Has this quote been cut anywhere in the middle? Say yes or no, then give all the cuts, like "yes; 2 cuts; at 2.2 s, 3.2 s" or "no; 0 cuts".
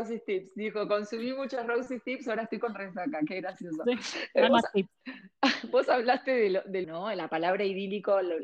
yes; 2 cuts; at 4.5 s, 6.8 s